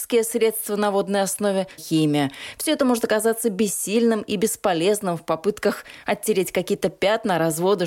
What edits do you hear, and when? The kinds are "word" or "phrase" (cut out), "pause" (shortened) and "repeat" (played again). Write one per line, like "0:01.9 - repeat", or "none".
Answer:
0:01.8 - word